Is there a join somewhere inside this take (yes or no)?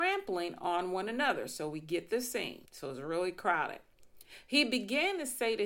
yes